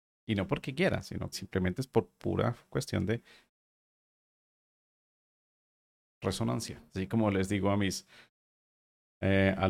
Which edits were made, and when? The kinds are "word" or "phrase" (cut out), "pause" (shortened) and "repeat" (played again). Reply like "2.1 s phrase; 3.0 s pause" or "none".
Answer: 1.3 s word; 6.9 s pause